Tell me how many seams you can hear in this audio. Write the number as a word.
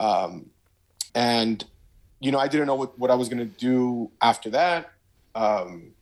one